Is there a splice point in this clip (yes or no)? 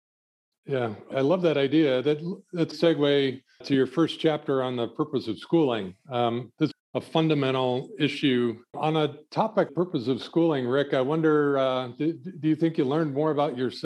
yes